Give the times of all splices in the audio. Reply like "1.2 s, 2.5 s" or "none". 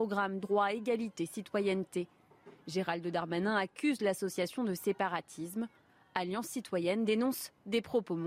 none